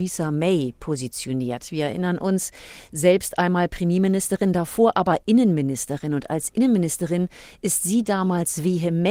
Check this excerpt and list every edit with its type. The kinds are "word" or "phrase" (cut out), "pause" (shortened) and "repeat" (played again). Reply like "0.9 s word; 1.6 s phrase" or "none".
none